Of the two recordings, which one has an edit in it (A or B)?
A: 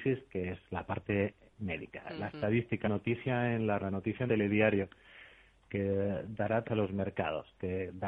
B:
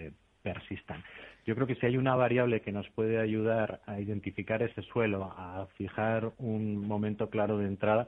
A